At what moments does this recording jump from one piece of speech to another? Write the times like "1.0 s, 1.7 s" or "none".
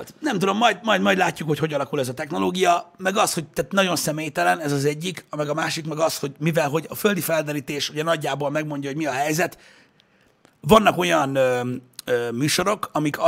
none